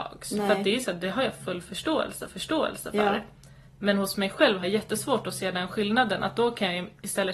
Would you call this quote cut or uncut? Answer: cut